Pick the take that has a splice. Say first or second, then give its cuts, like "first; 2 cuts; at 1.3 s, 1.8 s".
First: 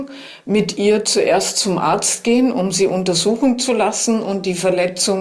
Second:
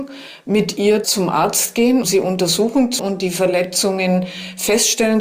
second; 3 cuts; at 1.0 s, 2.0 s, 3.0 s